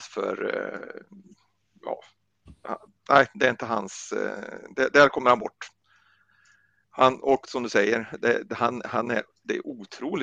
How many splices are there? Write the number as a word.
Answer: zero